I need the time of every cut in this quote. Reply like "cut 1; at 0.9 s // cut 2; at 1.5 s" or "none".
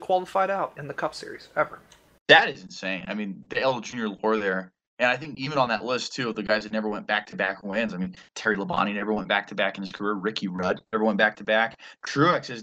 none